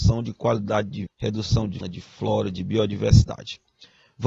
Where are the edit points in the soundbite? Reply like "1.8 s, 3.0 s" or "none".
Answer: 1.1 s, 1.8 s

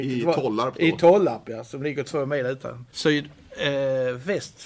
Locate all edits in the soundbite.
2.9 s

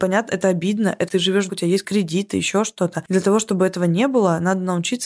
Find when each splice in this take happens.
1.1 s, 1.5 s, 1.8 s

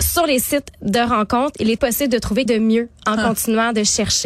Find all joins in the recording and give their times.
1.8 s, 2.5 s

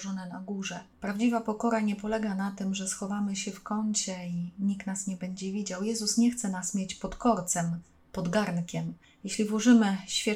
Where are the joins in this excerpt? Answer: 0.9 s

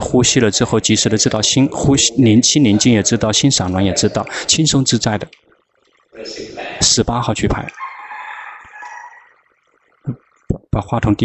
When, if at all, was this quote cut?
none

